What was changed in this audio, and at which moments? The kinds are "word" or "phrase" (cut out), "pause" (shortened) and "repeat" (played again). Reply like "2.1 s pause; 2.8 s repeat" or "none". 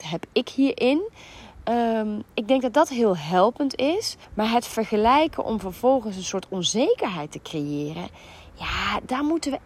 4.2 s pause